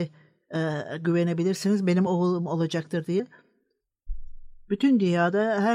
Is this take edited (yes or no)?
no